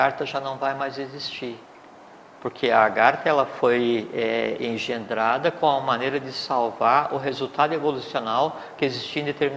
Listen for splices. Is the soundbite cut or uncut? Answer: uncut